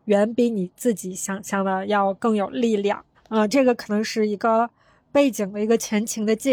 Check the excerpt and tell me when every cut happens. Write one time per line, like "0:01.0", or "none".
0:03.1